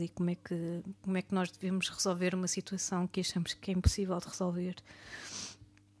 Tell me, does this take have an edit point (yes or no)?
no